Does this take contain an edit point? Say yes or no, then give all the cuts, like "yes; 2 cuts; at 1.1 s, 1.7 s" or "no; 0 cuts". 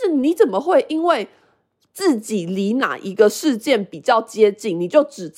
no; 0 cuts